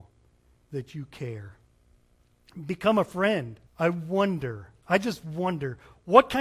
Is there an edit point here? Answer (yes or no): yes